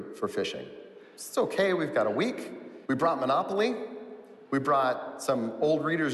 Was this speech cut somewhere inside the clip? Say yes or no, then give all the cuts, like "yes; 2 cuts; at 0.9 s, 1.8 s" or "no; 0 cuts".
yes; 1 cut; at 2.9 s